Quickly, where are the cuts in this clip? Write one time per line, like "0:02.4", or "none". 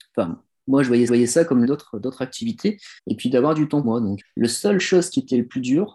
0:01.1
0:01.6
0:03.0
0:03.8
0:04.2